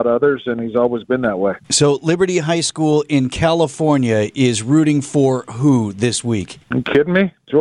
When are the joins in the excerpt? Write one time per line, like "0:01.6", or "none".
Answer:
0:01.6
0:06.6